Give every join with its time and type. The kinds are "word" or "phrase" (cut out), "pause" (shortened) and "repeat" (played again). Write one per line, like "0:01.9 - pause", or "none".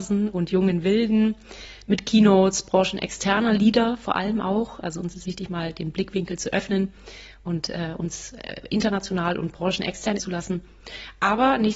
0:05.2 - phrase
0:10.2 - word

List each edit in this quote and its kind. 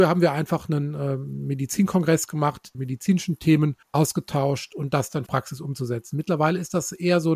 0:02.7 - phrase
0:03.8 - pause
0:05.3 - phrase

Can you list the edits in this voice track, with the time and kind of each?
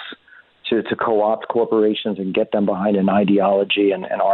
none

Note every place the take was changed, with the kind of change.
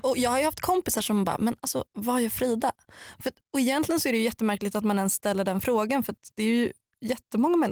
0:03.4 - pause

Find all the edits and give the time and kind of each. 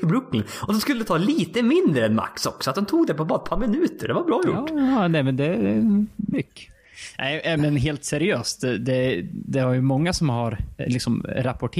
0:06.3 - word
0:07.6 - word
0:10.8 - word

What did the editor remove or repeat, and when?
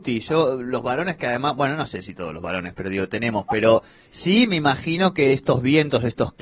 none

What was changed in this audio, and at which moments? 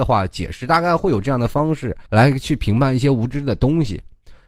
0:02.1 - pause

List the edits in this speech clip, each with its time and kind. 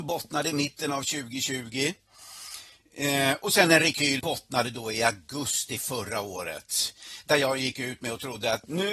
0:04.2 - phrase

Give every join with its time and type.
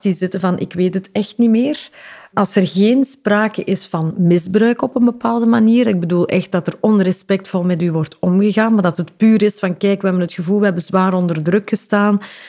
none

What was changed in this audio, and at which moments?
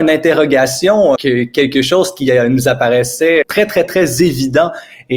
0:01.2 - word
0:03.4 - word

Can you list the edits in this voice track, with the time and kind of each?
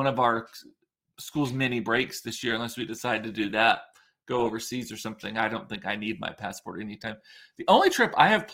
none

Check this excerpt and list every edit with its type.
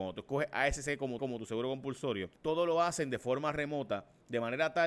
0:01.2 - repeat
0:02.4 - pause

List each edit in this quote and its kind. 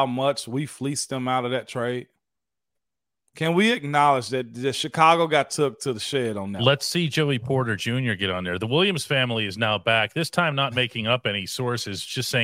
none

